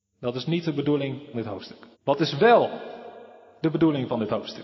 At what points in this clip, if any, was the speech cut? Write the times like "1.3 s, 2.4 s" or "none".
1.3 s, 1.9 s

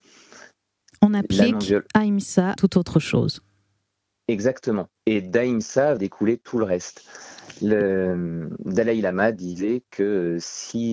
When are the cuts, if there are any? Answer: 2.6 s, 5.0 s, 6.0 s

